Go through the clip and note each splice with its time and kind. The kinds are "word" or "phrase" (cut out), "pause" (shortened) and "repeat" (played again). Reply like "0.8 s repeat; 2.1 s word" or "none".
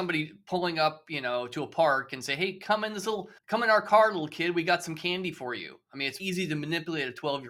3.4 s pause; 6.2 s word